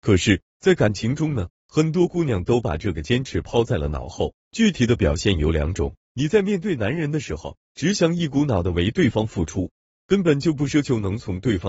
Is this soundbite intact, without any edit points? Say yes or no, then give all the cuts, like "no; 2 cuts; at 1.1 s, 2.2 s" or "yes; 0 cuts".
yes; 0 cuts